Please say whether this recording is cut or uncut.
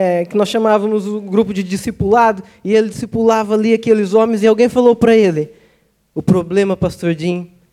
uncut